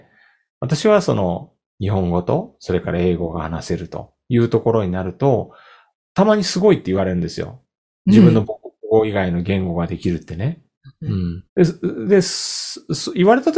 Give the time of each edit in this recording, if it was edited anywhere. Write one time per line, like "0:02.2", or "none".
0:11.5